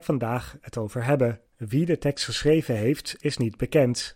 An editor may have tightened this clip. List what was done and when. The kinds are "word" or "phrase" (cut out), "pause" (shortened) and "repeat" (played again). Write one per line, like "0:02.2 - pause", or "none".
0:01.5 - pause